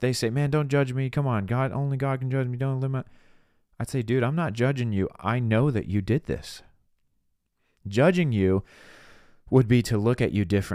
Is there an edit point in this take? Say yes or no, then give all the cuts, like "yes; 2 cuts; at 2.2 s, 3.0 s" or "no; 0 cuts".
no; 0 cuts